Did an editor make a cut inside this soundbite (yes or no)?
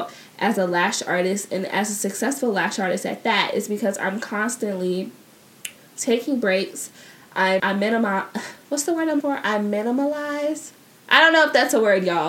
yes